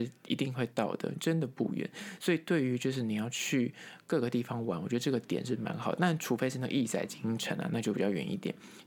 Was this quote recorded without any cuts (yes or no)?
no